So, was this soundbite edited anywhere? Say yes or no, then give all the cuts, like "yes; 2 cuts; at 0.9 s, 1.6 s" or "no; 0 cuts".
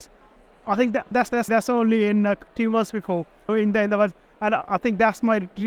yes; 3 cuts; at 1.1 s, 1.5 s, 3.5 s